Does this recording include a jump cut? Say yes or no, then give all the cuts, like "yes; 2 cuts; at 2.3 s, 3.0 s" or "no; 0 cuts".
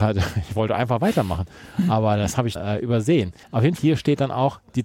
yes; 3 cuts; at 2.6 s, 3.4 s, 3.8 s